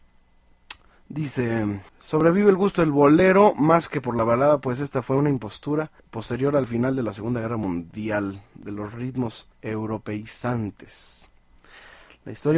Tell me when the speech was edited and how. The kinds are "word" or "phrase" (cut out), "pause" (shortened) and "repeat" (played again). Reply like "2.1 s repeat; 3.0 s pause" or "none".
1.9 s pause; 6.0 s pause; 9.5 s pause